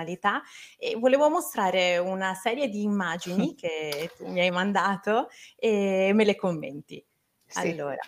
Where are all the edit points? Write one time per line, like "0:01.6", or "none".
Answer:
none